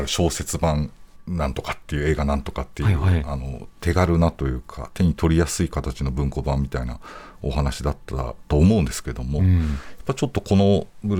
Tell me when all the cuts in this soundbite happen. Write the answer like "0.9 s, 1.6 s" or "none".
3.8 s